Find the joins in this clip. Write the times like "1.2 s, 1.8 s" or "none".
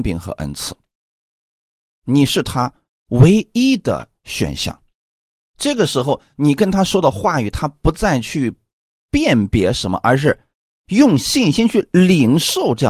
none